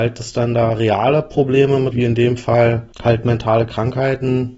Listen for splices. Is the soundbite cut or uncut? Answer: cut